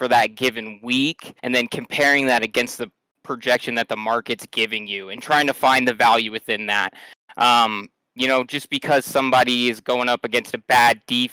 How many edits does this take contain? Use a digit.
1